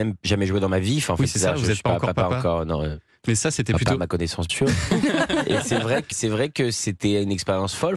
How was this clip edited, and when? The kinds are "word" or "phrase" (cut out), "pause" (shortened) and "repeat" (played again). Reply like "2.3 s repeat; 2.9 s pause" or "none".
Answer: 4.5 s word; 6.1 s word